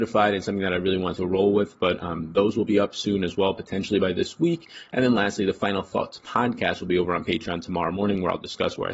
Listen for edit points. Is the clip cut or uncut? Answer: uncut